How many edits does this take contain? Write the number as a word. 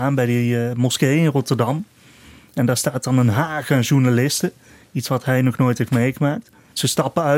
zero